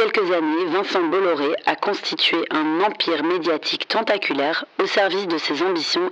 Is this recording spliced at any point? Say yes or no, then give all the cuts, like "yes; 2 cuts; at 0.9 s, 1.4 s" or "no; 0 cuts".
no; 0 cuts